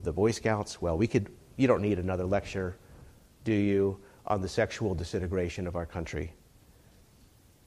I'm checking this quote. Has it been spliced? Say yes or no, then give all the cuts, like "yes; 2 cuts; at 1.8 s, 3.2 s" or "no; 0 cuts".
no; 0 cuts